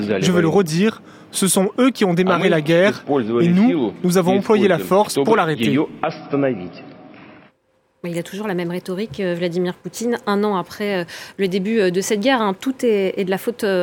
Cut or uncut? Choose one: uncut